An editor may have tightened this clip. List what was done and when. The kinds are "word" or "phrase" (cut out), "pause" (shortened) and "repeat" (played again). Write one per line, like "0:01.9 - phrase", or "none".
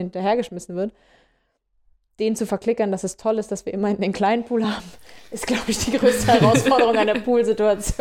none